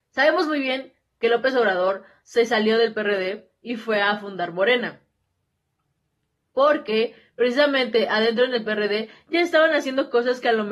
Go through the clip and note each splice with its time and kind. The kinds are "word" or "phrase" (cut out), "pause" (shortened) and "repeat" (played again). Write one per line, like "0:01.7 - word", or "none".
none